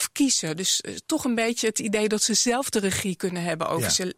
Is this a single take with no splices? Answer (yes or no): yes